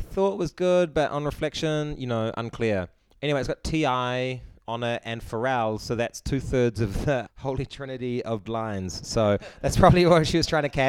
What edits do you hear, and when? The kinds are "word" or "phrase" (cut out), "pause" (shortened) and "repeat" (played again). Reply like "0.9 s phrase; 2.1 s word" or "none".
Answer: 7.3 s word; 8.5 s word